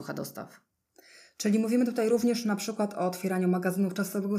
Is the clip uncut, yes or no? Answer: yes